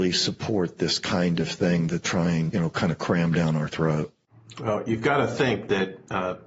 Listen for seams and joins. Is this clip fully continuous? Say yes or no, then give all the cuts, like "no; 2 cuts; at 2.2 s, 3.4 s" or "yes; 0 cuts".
no; 2 cuts; at 2.0 s, 2.5 s